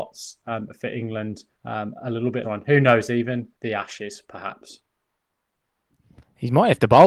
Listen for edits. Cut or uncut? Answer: cut